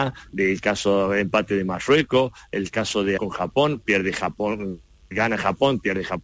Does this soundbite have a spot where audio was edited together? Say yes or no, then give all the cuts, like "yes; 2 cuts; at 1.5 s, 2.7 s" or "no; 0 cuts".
yes; 1 cut; at 3.2 s